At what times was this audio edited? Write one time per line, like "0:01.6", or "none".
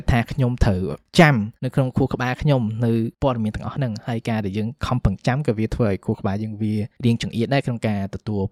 0:01.6